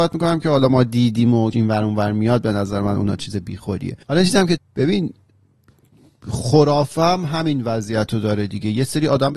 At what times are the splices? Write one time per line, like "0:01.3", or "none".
0:01.5
0:04.0
0:04.6